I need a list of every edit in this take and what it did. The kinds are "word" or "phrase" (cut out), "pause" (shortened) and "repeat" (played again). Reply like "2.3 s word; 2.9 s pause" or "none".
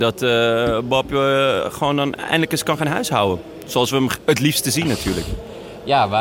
none

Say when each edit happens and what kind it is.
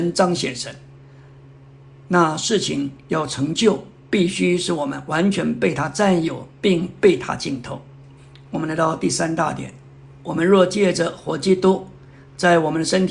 8.2 s pause

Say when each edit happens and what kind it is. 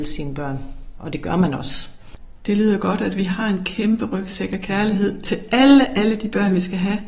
none

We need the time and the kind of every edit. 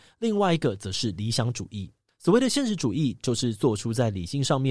2.1 s pause

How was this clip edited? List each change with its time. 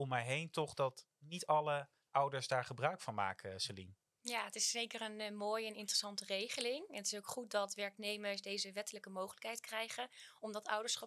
none

